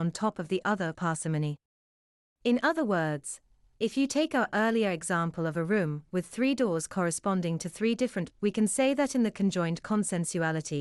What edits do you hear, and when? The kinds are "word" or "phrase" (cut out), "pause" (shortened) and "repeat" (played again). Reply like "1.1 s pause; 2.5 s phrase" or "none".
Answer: 0.9 s word; 8.3 s word